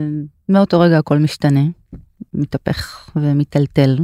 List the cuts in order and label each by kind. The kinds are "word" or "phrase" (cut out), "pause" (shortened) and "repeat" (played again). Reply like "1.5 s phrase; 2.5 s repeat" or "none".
none